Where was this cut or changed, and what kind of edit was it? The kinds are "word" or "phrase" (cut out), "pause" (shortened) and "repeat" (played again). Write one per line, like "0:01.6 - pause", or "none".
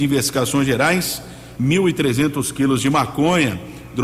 0:01.6 - phrase